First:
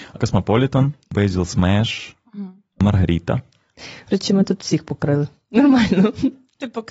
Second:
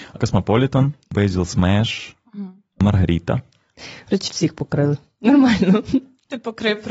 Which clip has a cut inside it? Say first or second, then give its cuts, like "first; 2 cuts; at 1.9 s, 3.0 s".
second; 1 cut; at 4.3 s